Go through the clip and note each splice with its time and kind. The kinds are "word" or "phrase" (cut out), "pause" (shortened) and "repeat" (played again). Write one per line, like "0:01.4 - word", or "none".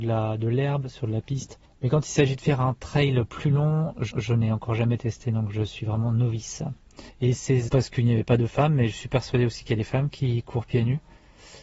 0:01.7 - pause
0:04.1 - repeat
0:07.1 - pause
0:07.7 - word